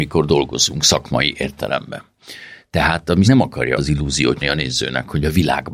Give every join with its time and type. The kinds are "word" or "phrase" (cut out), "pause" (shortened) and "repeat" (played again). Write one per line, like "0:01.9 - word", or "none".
0:03.2 - word
0:03.8 - word
0:04.4 - word